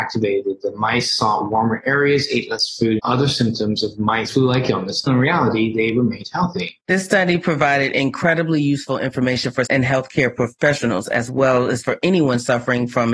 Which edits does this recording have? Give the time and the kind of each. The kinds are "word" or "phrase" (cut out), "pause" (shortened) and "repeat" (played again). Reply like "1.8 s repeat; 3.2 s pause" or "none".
3.0 s word; 4.3 s phrase; 5.1 s word; 6.8 s pause; 9.7 s word